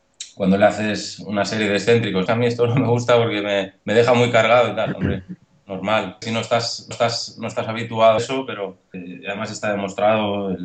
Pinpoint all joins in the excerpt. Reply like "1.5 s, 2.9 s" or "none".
2.3 s, 3.8 s, 6.2 s, 6.9 s, 8.2 s, 8.9 s